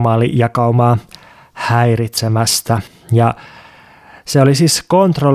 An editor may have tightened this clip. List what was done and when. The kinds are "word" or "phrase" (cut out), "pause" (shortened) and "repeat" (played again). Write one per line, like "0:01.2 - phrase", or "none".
0:02.9 - pause